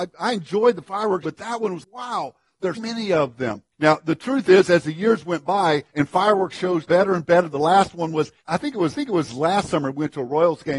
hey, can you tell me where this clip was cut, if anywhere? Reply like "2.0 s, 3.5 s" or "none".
1.2 s, 1.8 s, 2.7 s, 3.7 s, 5.9 s, 6.9 s, 8.4 s, 8.9 s